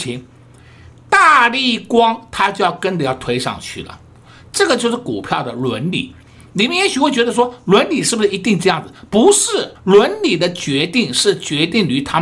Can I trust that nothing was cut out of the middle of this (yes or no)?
no